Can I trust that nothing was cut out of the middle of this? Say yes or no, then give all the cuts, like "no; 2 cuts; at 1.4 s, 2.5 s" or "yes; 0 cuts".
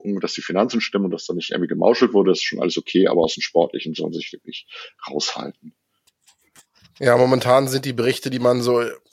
yes; 0 cuts